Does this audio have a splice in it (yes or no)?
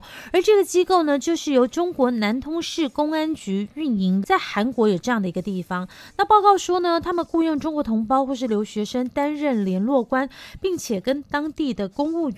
yes